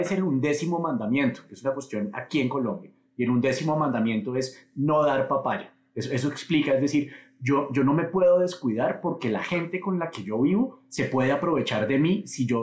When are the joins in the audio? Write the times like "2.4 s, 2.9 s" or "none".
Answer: none

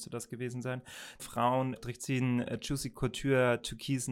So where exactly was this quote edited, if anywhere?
1.2 s, 1.8 s

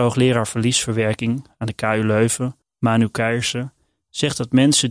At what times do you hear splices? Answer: 2.6 s

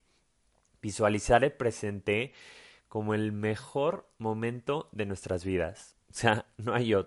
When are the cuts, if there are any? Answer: none

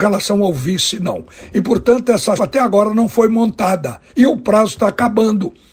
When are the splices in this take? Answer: 2.4 s, 4.1 s

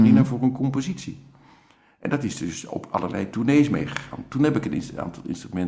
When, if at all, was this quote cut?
none

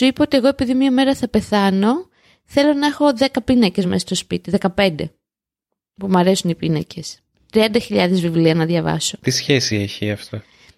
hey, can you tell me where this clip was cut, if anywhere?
none

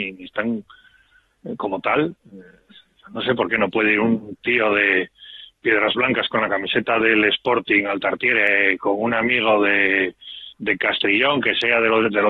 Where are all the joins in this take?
2.2 s, 10.5 s

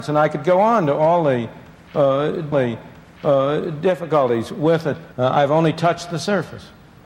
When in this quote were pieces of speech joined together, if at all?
2.5 s, 5.1 s

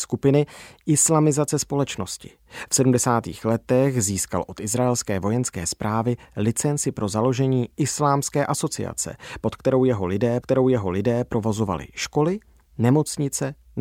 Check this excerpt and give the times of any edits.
10.4 s

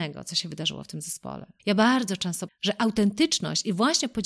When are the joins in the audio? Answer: 1.6 s, 2.5 s

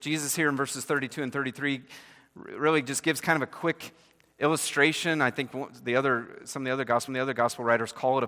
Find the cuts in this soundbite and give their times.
7.1 s

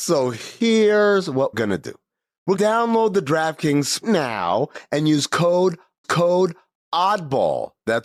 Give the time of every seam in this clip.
1.5 s, 2.5 s, 4.0 s, 6.0 s

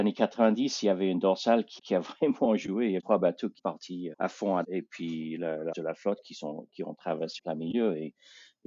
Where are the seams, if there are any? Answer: 1.8 s, 3.0 s, 3.6 s, 4.1 s, 4.6 s, 5.7 s, 7.4 s

